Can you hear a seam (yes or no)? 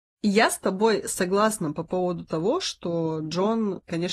no